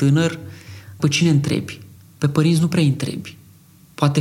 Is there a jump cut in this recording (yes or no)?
yes